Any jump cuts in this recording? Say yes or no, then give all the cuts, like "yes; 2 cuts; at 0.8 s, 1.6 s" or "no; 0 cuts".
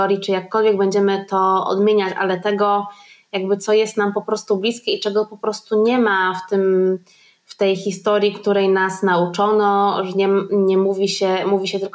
no; 0 cuts